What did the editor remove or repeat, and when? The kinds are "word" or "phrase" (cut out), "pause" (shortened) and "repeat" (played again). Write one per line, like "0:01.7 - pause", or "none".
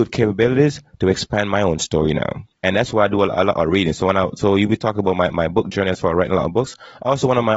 0:02.5 - pause